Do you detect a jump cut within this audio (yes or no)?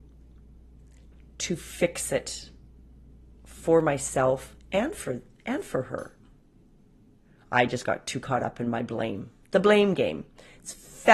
no